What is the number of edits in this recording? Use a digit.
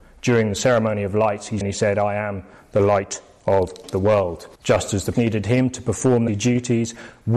4